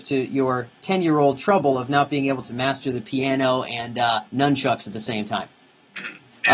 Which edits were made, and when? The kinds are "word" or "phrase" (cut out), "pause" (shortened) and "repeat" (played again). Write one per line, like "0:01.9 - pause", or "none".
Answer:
0:04.3 - pause